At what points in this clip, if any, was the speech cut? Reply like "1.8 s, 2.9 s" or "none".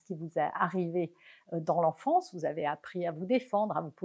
none